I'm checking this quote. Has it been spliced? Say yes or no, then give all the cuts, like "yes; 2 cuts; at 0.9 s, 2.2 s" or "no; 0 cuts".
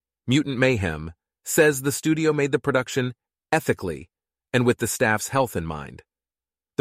no; 0 cuts